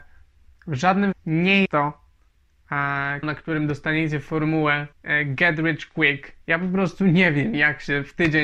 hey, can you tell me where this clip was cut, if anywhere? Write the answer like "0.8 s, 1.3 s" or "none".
1.1 s, 1.7 s, 3.2 s, 4.9 s, 6.4 s